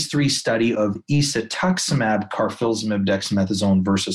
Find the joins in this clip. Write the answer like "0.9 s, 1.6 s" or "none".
none